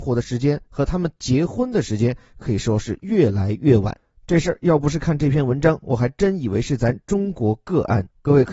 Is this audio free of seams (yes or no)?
yes